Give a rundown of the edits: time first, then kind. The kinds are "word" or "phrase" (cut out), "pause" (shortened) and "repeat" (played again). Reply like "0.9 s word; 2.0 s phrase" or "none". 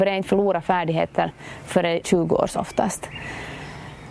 2.0 s word; 2.5 s word